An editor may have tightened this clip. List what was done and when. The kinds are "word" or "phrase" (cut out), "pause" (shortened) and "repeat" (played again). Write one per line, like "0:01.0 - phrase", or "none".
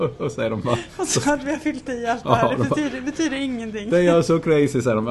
none